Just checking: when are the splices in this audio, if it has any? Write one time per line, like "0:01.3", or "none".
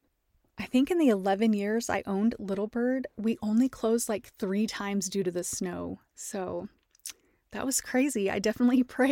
none